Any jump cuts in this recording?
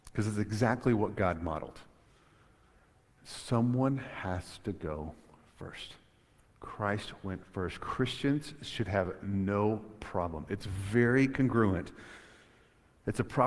no; 0 cuts

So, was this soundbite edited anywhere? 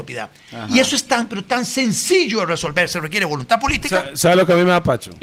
no; 0 cuts

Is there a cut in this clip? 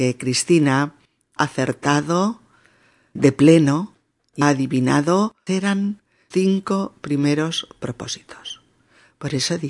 yes; 5 cuts; at 1.4 s, 3.2 s, 4.4 s, 5.5 s, 6.3 s

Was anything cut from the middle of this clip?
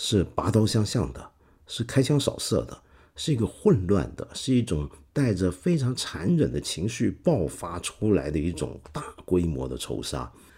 no; 0 cuts

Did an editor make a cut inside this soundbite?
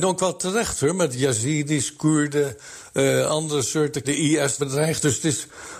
yes; 2 cuts; at 4.0 s, 4.6 s

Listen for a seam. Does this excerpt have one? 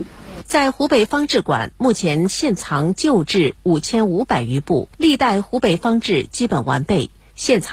yes; 1 cut; at 4.9 s

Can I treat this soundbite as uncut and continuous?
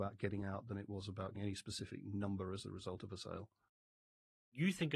no; 1 cut; at 1.4 s

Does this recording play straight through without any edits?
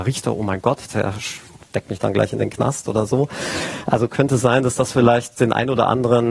yes; 0 cuts

